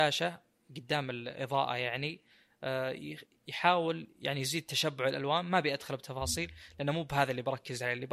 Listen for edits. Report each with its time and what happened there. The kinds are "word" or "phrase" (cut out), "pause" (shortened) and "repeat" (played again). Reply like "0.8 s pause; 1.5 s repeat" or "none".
none

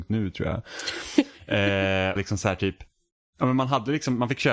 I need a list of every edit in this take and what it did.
2.2 s phrase

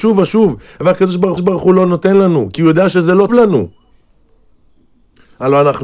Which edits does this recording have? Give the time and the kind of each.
1.4 s repeat; 3.3 s word

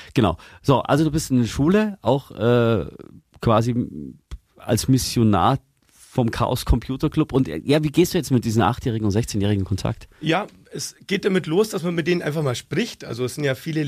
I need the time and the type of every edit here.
none

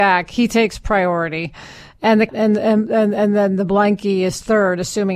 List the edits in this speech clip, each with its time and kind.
2.3 s word

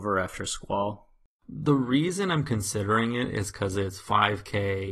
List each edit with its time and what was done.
none

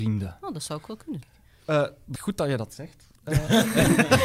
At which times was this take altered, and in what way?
1.2 s word; 2.2 s word; 3.2 s pause

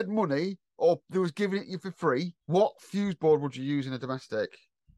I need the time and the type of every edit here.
2.4 s pause

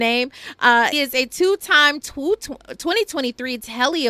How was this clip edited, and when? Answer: 0.9 s word

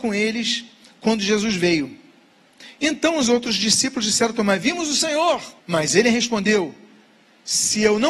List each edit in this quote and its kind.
5.6 s pause

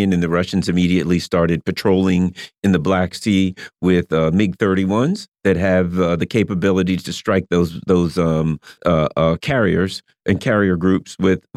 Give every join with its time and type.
8.8 s pause

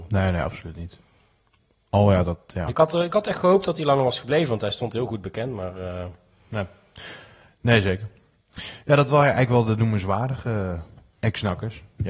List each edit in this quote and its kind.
none

